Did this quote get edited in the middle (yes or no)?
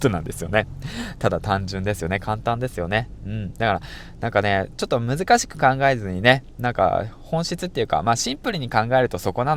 no